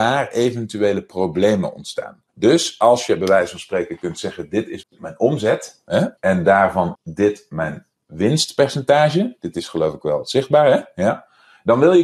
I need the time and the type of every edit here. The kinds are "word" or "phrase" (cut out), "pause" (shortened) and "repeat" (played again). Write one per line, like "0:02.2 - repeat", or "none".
0:02.3 - pause
0:04.8 - word
0:06.2 - pause
0:06.9 - word